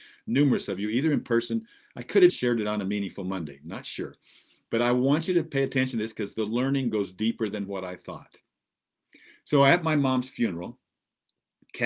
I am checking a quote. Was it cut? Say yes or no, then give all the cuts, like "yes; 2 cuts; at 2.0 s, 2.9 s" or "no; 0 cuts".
yes; 1 cut; at 2.3 s